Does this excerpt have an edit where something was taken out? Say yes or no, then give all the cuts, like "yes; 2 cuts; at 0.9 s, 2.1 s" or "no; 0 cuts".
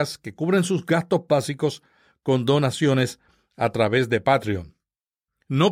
no; 0 cuts